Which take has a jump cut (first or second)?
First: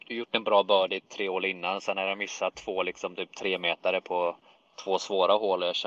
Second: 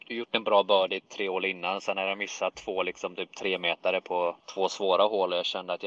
second